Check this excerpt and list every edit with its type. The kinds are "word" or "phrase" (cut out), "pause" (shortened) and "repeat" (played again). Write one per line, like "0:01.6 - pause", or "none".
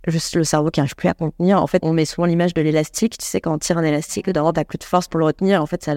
0:01.8 - word